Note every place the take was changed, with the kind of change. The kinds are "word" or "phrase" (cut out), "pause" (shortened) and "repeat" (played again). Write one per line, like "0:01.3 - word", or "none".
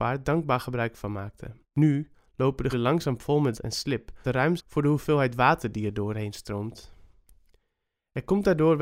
0:01.6 - pause
0:02.7 - word
0:03.5 - word
0:04.2 - phrase
0:04.6 - word